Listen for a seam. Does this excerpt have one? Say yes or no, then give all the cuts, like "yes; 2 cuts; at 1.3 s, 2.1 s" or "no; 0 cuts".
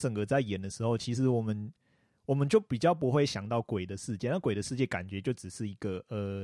no; 0 cuts